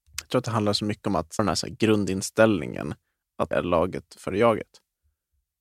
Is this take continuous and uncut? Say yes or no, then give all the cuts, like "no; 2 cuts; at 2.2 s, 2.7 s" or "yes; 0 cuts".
no; 2 cuts; at 1.4 s, 3.5 s